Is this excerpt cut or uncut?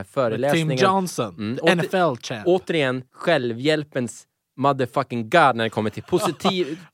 cut